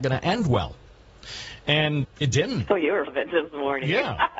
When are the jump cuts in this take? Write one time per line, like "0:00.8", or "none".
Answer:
0:02.0
0:03.1